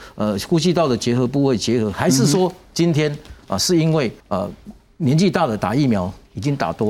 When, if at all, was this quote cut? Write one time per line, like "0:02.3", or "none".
0:04.2